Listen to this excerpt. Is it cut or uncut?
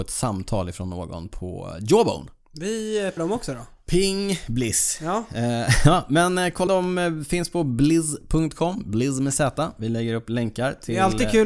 cut